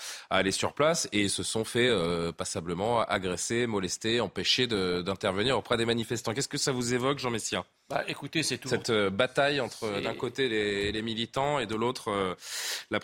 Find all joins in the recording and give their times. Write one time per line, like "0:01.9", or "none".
none